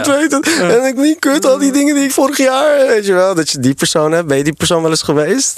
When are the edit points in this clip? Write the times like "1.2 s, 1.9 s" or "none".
1.0 s, 2.1 s, 2.9 s